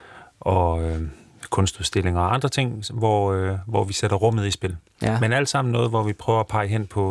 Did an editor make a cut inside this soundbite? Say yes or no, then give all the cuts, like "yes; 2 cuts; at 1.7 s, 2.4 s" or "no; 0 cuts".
no; 0 cuts